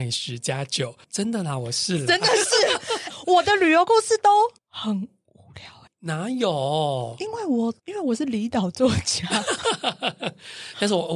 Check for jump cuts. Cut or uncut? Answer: cut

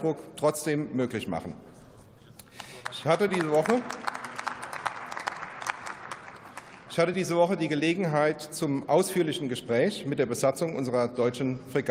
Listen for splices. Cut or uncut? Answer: uncut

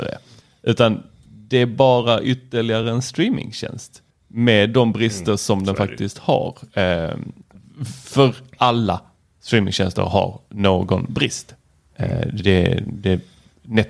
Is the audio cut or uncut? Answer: uncut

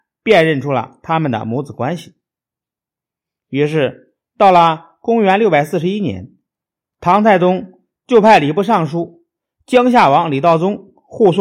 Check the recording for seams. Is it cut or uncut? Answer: uncut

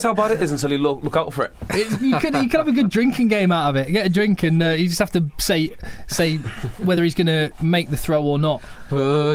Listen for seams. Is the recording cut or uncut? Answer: uncut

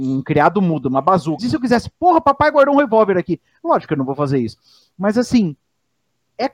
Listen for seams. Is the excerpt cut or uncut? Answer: cut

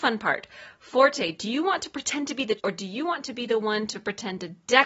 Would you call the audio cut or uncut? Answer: cut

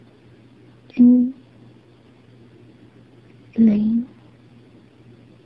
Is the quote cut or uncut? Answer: uncut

